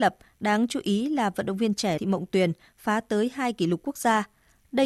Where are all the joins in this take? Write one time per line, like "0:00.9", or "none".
0:02.0